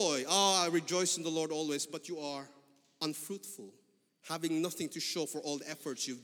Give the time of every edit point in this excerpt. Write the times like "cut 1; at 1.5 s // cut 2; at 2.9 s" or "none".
cut 1; at 4.1 s